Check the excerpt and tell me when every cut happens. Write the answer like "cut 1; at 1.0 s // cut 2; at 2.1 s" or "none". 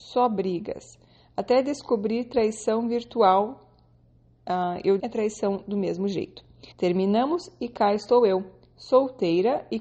cut 1; at 5.0 s // cut 2; at 6.7 s